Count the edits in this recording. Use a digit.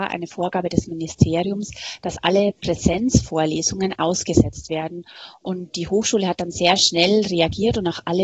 0